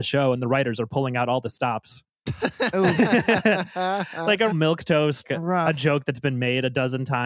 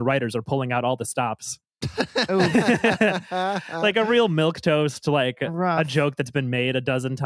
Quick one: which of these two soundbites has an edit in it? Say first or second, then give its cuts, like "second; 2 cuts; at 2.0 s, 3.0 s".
first; 2 cuts; at 4.5 s, 5.2 s